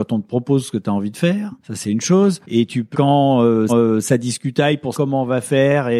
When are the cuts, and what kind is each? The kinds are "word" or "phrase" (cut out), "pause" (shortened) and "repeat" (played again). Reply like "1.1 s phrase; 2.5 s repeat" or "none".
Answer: 1.6 s pause; 2.4 s pause; 2.9 s phrase; 3.7 s repeat; 4.9 s word